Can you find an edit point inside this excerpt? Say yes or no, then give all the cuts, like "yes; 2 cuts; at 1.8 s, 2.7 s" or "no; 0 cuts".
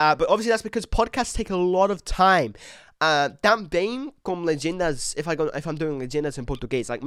no; 0 cuts